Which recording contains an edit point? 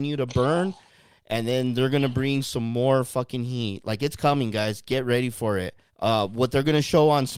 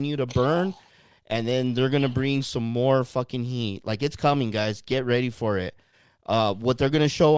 first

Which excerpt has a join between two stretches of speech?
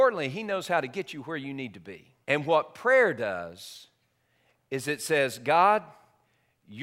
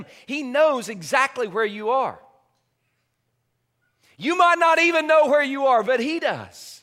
first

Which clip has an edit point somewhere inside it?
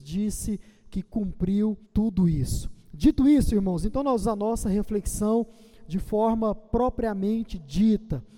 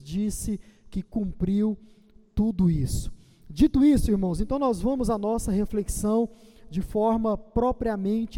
first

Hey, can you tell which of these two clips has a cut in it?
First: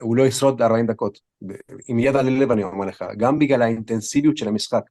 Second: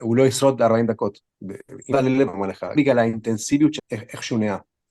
second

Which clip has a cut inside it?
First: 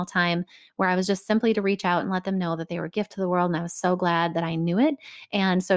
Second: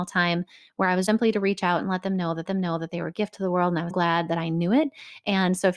second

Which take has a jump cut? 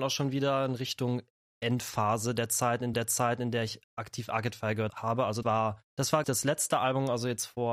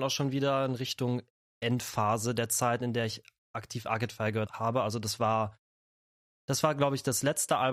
first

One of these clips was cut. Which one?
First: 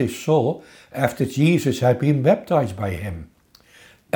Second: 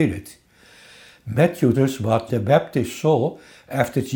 second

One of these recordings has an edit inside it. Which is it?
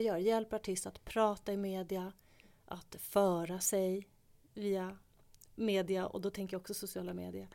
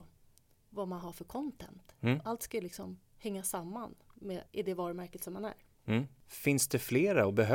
second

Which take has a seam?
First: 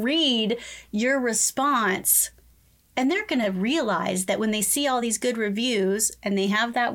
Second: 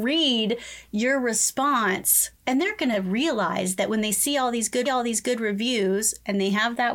second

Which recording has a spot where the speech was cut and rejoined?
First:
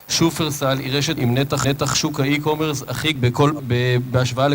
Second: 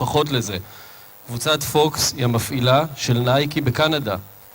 first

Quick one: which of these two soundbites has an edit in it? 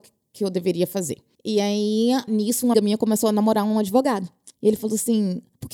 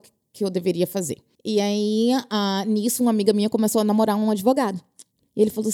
first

